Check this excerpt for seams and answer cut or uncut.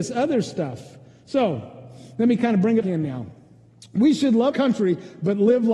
cut